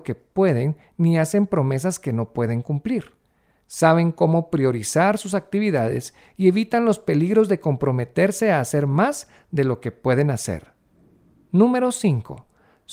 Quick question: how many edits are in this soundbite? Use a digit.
0